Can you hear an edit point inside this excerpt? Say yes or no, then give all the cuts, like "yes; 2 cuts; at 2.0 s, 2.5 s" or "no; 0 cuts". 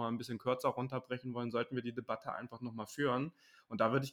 no; 0 cuts